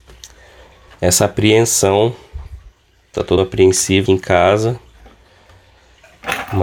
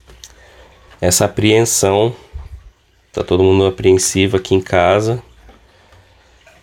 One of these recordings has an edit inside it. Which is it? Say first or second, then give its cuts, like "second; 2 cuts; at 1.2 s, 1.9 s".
first; 2 cuts; at 3.4 s, 4.1 s